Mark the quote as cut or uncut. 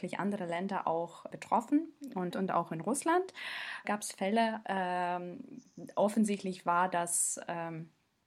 cut